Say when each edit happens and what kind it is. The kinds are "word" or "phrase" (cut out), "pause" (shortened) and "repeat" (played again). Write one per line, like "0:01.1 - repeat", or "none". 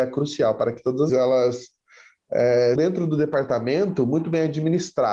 0:01.1 - word
0:02.8 - word